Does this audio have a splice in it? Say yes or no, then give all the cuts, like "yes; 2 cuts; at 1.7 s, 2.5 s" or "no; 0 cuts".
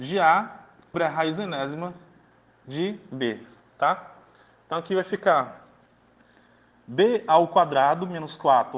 yes; 1 cut; at 0.9 s